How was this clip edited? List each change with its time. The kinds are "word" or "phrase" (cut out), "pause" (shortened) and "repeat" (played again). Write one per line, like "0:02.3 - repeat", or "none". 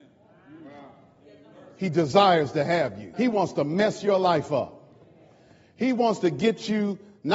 0:03.1 - pause